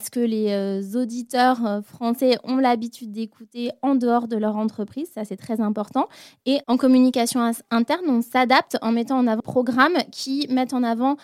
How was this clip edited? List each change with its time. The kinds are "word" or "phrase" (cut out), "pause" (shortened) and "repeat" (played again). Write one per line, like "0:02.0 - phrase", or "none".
0:09.4 - word